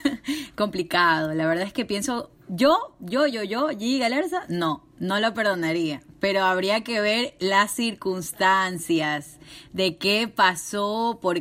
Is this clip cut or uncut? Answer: uncut